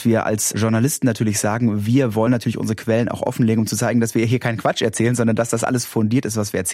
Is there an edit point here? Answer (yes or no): no